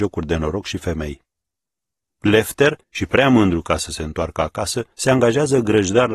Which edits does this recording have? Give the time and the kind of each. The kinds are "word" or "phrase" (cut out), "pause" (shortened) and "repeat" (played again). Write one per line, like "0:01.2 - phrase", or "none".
0:02.8 - pause
0:04.9 - pause